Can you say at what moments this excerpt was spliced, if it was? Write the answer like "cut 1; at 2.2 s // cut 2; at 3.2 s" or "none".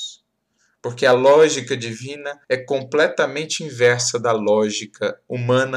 cut 1; at 2.4 s

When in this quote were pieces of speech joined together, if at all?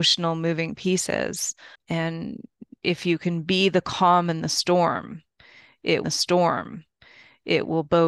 cut 1; at 1.7 s // cut 2; at 6.0 s

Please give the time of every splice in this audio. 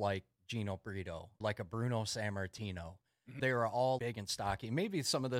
cut 1; at 1.4 s // cut 2; at 3.4 s // cut 3; at 4.0 s

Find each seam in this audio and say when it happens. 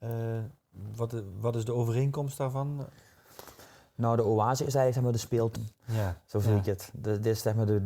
cut 1; at 5.6 s

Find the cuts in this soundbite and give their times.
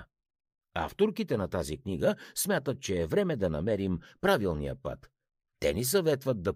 none

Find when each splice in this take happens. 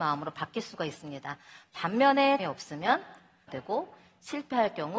cut 1; at 2.4 s // cut 2; at 3.5 s

